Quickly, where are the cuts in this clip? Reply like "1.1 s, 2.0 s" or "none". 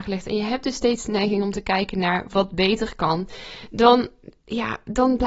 none